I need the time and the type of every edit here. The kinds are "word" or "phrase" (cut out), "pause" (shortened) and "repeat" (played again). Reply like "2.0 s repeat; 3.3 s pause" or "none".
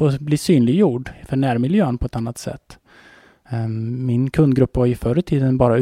none